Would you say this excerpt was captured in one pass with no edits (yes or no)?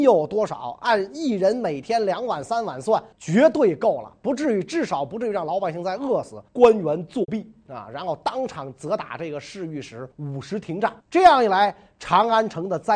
no